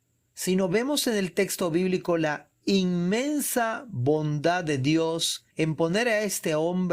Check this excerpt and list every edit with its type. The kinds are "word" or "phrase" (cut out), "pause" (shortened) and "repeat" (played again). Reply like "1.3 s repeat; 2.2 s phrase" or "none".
5.5 s pause